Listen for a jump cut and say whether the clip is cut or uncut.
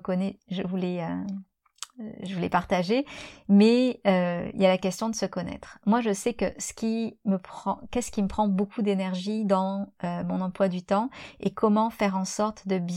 uncut